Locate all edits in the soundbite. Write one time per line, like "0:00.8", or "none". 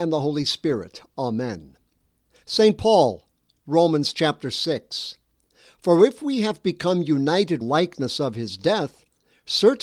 0:07.6